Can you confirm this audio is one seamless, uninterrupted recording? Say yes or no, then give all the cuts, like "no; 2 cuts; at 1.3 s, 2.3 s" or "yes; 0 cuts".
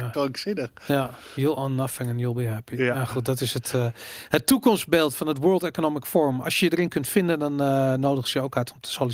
yes; 0 cuts